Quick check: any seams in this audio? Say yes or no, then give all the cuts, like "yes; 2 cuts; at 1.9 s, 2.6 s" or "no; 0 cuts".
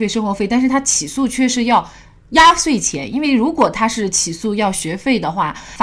no; 0 cuts